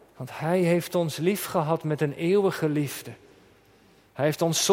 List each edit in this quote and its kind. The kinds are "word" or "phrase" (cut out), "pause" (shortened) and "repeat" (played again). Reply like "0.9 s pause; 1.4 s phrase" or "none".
none